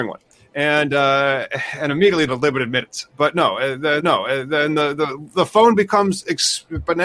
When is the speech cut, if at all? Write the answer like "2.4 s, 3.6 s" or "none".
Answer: 1.9 s, 2.3 s, 4.0 s

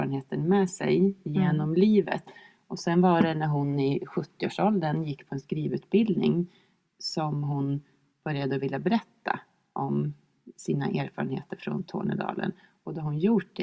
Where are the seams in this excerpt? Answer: none

